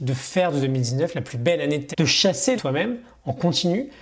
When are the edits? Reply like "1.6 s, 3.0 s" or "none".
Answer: 1.9 s, 2.6 s